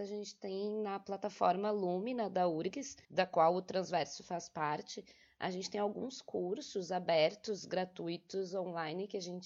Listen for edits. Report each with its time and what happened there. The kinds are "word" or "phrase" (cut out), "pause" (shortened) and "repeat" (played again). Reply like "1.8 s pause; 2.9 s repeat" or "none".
3.0 s pause